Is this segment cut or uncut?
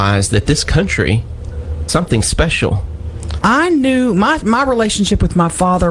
cut